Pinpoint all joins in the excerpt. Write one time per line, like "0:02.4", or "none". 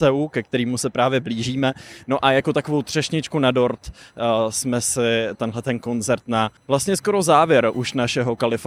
0:06.6